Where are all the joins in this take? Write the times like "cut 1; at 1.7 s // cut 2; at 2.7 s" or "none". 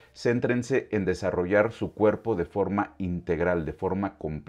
none